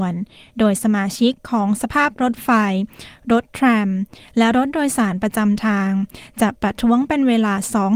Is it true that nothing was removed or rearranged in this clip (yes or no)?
yes